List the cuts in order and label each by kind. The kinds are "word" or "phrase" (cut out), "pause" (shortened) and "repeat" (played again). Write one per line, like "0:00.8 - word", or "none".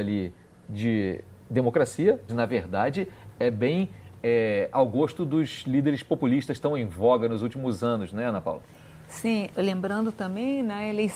0:02.3 - word
0:09.5 - phrase